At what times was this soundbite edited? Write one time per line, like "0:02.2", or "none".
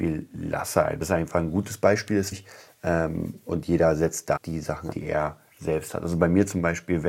0:01.0
0:02.3
0:04.4
0:04.9

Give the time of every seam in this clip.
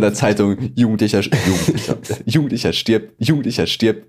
0:03.2

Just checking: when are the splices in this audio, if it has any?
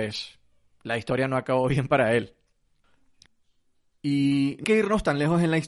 0:04.6

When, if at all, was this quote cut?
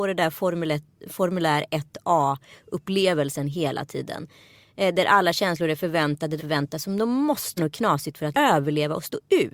0:06.4
0:07.6
0:08.3

